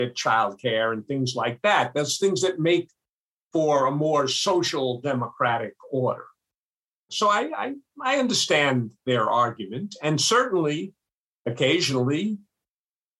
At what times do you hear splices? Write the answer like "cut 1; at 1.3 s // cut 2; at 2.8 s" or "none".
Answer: none